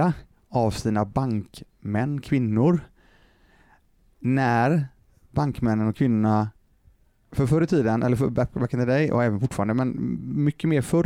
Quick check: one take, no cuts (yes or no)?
yes